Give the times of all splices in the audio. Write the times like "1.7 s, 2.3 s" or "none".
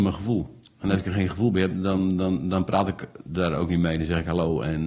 none